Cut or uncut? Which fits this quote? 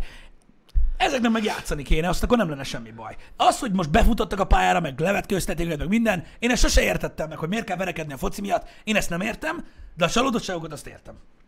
uncut